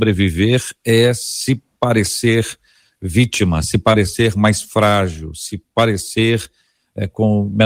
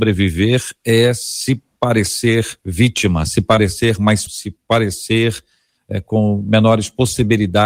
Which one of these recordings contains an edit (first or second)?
second